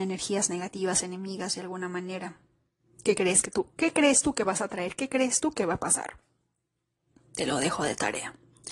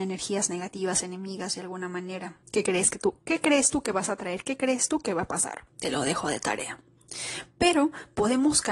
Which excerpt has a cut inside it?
second; 2 cuts; at 2.4 s, 5.7 s

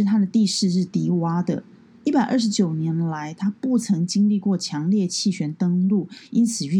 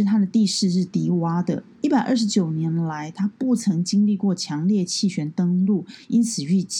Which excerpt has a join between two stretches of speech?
second; 1 cut; at 1.7 s

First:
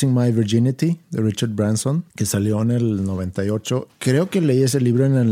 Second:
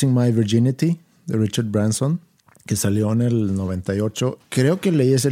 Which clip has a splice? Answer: first; 2 cuts; at 1.0 s, 2.1 s

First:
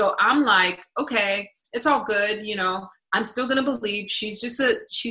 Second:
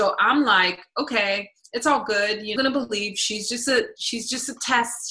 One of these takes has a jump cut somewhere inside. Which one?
second; 1 cut; at 2.6 s

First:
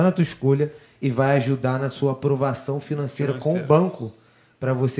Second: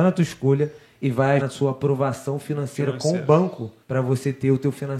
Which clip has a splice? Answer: second; 2 cuts; at 1.4 s, 3.8 s

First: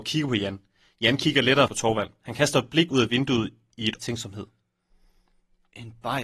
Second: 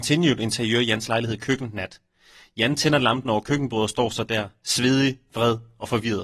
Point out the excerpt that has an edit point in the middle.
first; 2 cuts; at 1.7 s, 4.0 s

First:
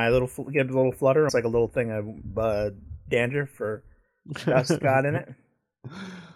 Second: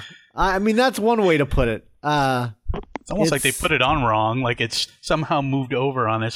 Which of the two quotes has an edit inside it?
first; 1 cut; at 1.3 s

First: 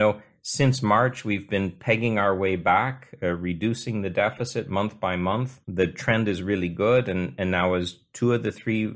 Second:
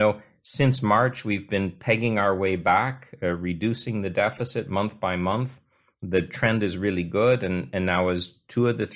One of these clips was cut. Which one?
first; 1 cut; at 5.6 s

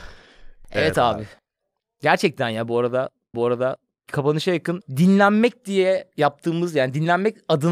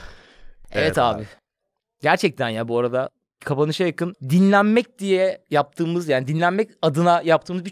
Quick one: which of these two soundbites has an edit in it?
first; 1 cut; at 3.3 s

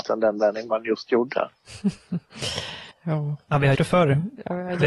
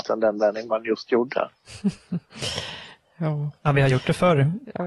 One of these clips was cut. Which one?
first; 2 cuts; at 2.9 s, 3.7 s

